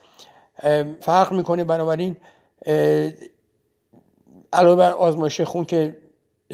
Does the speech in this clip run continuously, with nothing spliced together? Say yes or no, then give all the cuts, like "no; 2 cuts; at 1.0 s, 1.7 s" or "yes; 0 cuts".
no; 1 cut; at 1.0 s